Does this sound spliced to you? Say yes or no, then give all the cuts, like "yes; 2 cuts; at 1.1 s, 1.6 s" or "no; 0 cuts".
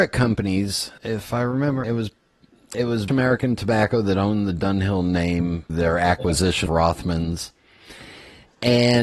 yes; 6 cuts; at 1.0 s, 1.8 s, 2.7 s, 3.1 s, 5.7 s, 6.7 s